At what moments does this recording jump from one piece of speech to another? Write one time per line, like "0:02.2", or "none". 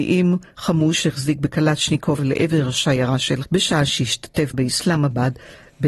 0:02.2
0:03.4
0:04.5